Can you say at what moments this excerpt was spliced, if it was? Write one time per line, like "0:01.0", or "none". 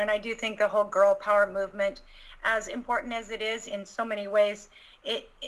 none

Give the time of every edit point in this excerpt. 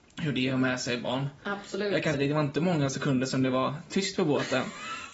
0:02.1

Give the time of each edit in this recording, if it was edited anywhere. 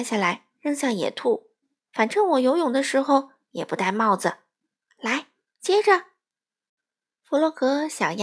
0:01.6

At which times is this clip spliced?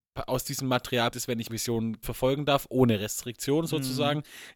0:01.1
0:01.5
0:02.0

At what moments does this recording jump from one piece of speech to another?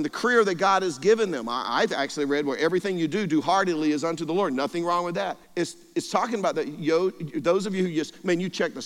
0:05.4

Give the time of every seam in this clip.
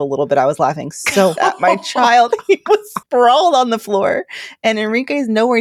0:01.4
0:03.0

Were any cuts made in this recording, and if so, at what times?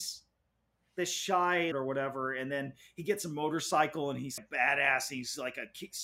0:01.7
0:04.4

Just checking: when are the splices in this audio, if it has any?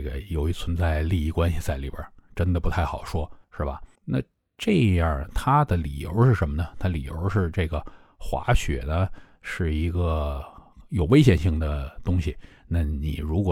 0:03.4
0:04.0

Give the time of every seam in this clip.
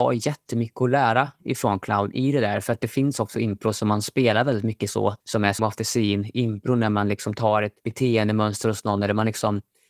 0:05.2
0:05.6
0:07.8

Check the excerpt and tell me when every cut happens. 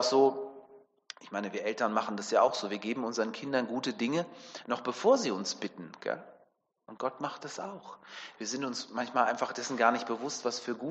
none

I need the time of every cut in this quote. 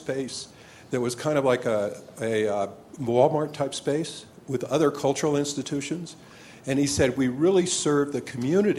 none

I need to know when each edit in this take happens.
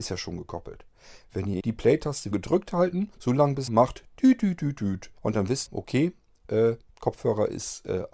0:01.6
0:02.3
0:03.1
0:03.7
0:05.2
0:05.7
0:06.9

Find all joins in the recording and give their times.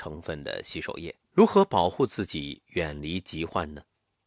0:01.2

